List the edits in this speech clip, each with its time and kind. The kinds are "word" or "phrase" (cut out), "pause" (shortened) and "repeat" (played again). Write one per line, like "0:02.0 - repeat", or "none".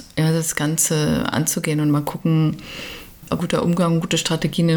0:03.4 - phrase